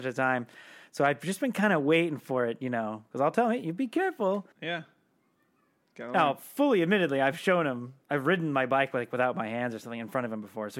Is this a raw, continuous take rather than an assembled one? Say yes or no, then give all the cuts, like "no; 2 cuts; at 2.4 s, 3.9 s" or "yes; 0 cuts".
no; 2 cuts; at 4.5 s, 8.0 s